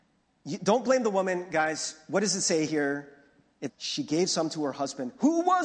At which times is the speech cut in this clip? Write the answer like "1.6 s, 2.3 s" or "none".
3.7 s